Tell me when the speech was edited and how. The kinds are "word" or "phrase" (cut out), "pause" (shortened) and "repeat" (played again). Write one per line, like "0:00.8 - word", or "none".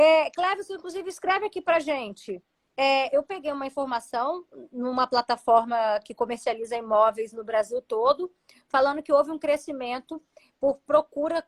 none